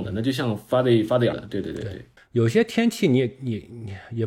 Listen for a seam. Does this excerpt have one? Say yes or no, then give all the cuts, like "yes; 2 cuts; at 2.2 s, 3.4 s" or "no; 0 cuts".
yes; 2 cuts; at 1.3 s, 2.2 s